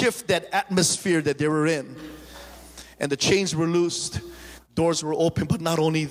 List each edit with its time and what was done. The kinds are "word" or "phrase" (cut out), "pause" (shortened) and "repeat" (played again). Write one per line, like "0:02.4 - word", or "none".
none